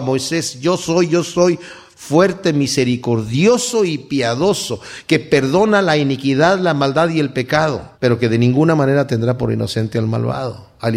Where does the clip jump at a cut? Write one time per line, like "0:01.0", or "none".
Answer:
0:07.9